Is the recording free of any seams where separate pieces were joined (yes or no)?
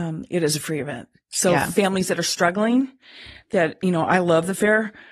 yes